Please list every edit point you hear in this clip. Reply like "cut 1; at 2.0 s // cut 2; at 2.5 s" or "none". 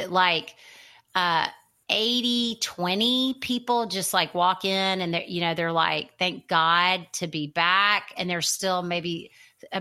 none